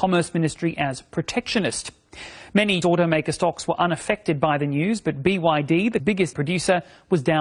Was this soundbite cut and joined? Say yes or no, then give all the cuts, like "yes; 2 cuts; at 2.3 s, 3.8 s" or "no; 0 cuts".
yes; 3 cuts; at 2.8 s, 6.0 s, 6.3 s